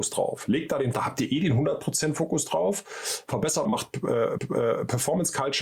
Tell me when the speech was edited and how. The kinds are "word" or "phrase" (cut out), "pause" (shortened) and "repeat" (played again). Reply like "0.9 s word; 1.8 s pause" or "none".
0.9 s phrase; 3.6 s phrase; 4.4 s repeat